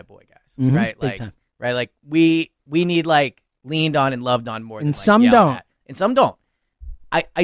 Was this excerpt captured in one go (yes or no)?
yes